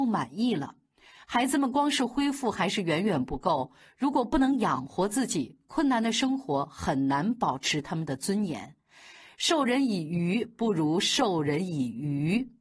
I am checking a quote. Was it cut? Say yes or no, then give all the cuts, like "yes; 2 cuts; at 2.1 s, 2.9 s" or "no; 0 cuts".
no; 0 cuts